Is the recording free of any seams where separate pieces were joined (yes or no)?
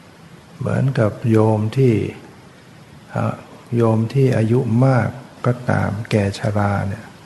no